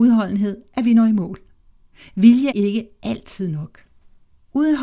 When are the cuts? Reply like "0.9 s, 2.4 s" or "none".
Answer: 2.5 s